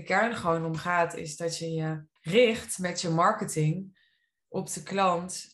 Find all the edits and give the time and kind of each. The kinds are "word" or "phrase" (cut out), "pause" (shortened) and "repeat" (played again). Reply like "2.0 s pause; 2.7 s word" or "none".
2.2 s pause